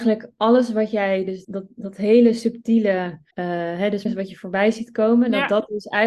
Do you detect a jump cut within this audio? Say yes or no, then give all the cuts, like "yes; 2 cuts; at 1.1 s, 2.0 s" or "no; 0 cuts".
yes; 3 cuts; at 1.4 s, 3.3 s, 4.1 s